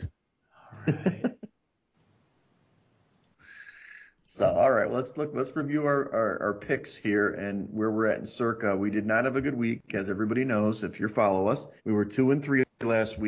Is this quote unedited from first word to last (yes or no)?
no